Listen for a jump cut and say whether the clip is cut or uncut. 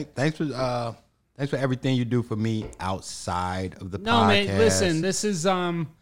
uncut